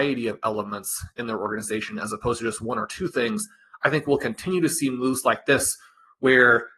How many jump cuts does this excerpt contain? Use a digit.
0